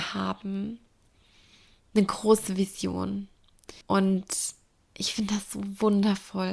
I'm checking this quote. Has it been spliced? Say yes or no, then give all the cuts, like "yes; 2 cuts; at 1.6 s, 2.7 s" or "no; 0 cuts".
yes; 1 cut; at 3.8 s